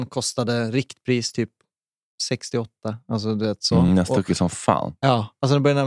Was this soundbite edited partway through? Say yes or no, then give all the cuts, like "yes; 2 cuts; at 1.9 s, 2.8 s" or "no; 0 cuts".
no; 0 cuts